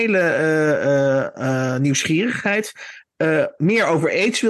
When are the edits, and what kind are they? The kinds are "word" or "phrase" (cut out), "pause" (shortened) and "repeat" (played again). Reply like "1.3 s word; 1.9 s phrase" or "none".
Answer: none